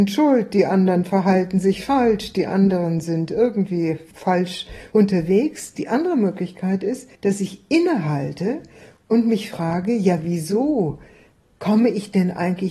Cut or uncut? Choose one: cut